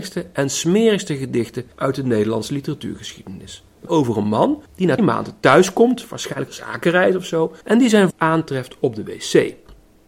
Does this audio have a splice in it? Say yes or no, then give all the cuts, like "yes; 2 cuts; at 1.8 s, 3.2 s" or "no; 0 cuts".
yes; 7 cuts; at 1.7 s, 3.9 s, 4.7 s, 5.0 s, 6.5 s, 7.6 s, 8.1 s